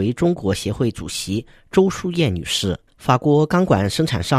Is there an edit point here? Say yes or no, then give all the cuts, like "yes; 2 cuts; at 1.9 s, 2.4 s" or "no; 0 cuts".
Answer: yes; 1 cut; at 2.9 s